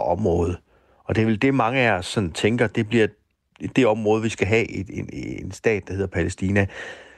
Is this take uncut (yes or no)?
yes